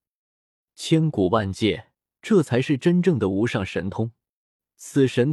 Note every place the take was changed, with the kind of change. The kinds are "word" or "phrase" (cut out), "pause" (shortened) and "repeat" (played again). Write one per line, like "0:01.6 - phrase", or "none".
0:02.1 - pause